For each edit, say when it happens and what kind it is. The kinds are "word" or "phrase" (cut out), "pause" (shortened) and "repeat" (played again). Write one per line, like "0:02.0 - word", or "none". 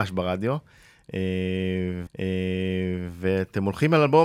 0:02.1 - repeat